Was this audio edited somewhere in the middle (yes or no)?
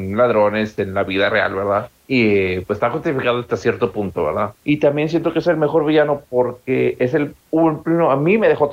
yes